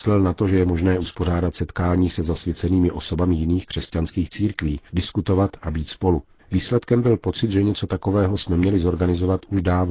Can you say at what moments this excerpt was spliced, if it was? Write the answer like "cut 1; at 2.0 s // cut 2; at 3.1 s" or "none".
cut 1; at 4.9 s // cut 2; at 6.4 s